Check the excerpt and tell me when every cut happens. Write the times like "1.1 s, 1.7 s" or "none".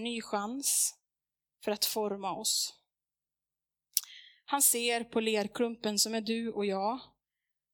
none